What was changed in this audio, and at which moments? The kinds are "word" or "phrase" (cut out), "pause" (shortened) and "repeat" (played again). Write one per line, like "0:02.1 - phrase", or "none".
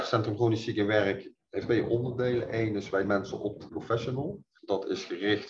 0:01.6 - word
0:03.0 - word
0:03.7 - phrase